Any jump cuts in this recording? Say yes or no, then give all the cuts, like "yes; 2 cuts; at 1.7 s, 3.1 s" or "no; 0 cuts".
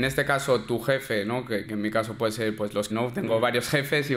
yes; 2 cuts; at 1.6 s, 2.9 s